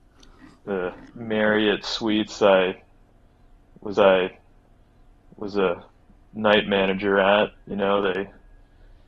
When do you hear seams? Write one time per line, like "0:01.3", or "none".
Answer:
0:01.1
0:03.9
0:07.6